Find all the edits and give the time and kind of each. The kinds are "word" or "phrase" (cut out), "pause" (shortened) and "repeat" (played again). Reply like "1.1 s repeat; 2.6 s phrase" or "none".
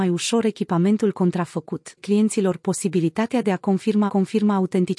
2.0 s word; 4.1 s repeat